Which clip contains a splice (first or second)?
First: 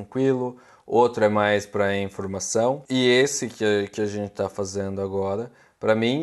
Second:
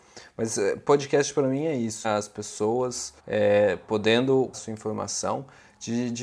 second